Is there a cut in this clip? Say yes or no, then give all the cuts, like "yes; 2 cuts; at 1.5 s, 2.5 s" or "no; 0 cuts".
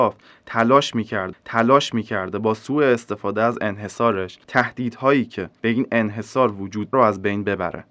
yes; 3 cuts; at 1.3 s, 4.4 s, 6.9 s